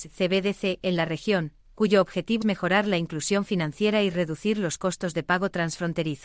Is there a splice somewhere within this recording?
yes; 2 cuts; at 1.6 s, 2.4 s

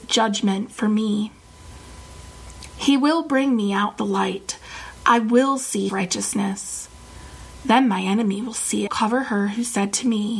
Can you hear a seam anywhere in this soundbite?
yes; 3 cuts; at 4.0 s, 5.9 s, 8.9 s

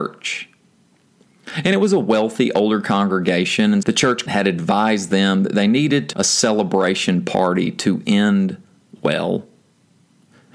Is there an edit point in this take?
yes; 3 cuts; at 3.8 s, 4.3 s, 6.1 s

